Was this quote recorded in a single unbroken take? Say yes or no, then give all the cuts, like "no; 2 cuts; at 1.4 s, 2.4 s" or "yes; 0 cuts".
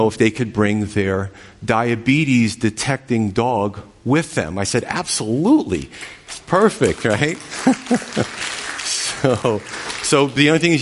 yes; 0 cuts